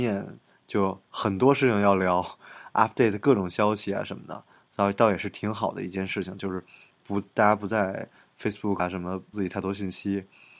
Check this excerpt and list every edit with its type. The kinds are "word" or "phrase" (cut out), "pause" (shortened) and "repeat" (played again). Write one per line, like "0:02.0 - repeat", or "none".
0:08.8 - word
0:09.3 - word